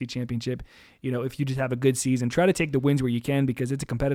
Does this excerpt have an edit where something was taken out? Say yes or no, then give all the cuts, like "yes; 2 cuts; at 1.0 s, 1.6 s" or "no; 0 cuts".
no; 0 cuts